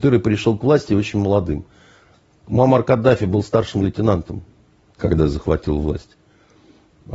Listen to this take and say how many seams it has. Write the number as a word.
zero